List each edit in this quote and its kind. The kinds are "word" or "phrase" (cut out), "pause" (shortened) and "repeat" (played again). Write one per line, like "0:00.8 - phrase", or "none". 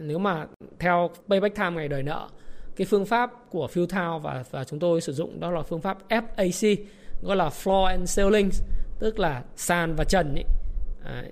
0:01.2 - pause

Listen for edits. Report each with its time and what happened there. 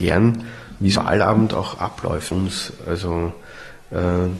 0:00.9 - word
0:02.3 - word

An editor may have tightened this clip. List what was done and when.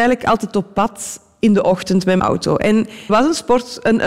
0:02.2 - word
0:03.1 - word

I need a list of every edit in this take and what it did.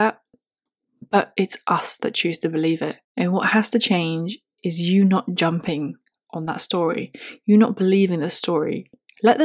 0:03.0 - pause

